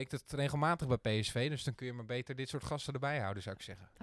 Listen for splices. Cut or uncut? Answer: uncut